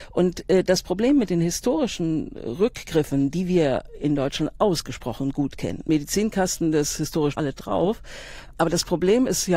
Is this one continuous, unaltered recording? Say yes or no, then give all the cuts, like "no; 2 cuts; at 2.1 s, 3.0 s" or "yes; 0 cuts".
no; 2 cuts; at 5.9 s, 7.3 s